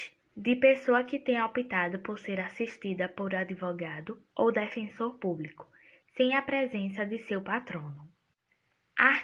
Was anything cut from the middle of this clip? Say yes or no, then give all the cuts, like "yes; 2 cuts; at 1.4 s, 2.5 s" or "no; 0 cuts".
no; 0 cuts